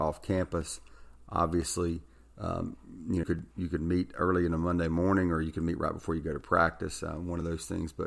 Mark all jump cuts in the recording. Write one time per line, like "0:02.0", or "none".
0:03.2